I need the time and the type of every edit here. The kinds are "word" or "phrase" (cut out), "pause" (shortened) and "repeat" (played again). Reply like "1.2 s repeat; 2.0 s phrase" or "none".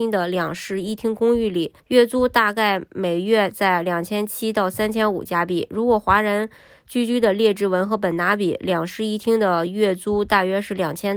1.8 s pause

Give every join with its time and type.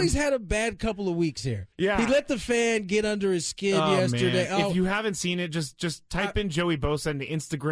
1.7 s pause

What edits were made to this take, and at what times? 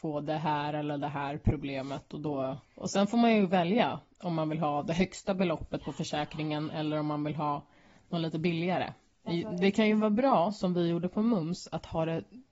2.6 s pause

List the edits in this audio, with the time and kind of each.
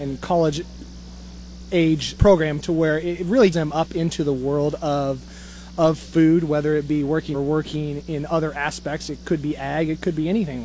2.2 s word; 3.5 s word; 7.3 s phrase

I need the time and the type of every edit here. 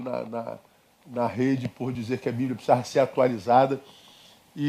none

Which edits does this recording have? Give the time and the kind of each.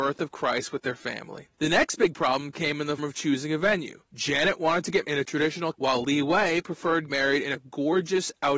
1.5 s pause; 3.0 s word; 4.1 s pause; 5.0 s word; 5.7 s phrase; 7.1 s word

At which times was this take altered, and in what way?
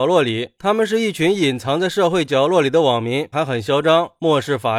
3.3 s phrase

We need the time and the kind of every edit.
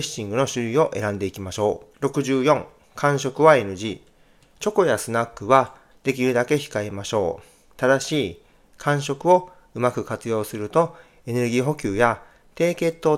1.9 s pause

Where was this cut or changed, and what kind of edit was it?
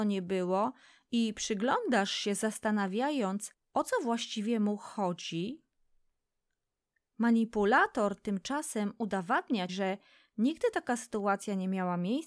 9.7 s word

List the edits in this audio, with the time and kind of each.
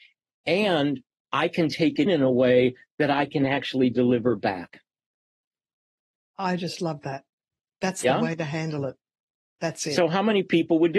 2.1 s word

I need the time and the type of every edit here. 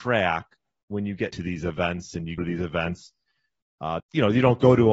1.3 s word; 2.4 s word; 4.0 s word

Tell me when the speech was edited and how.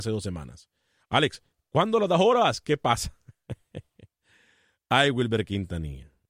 none

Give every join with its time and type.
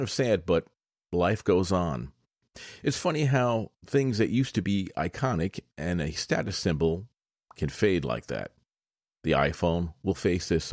none

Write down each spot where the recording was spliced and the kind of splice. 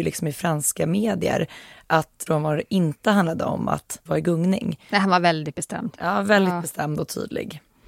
2.3 s word; 4.1 s word

